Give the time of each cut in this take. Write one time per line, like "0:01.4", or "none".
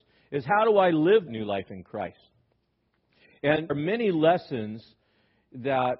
0:01.3
0:03.7